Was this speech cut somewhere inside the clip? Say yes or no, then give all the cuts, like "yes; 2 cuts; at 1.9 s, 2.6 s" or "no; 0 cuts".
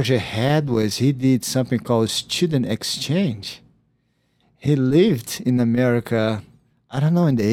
no; 0 cuts